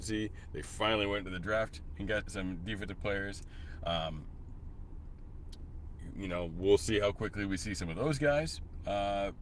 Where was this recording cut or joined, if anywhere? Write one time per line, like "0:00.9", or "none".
0:02.2